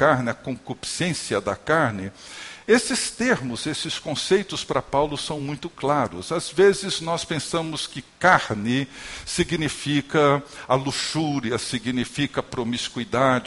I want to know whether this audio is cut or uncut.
uncut